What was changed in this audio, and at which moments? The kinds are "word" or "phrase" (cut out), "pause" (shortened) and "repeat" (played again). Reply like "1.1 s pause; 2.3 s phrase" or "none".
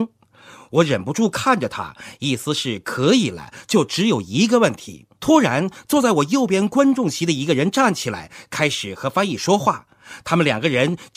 5.1 s pause